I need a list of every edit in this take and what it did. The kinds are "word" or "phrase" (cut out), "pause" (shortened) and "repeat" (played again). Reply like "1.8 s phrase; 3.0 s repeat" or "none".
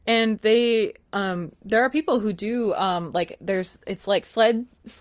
none